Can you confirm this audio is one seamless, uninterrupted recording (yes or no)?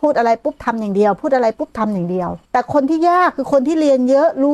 no